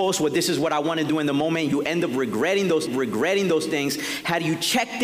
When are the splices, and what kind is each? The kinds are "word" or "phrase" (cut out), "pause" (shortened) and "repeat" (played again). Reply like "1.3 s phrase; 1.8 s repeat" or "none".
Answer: 2.9 s repeat